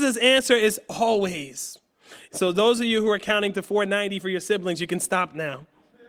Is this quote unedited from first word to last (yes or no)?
yes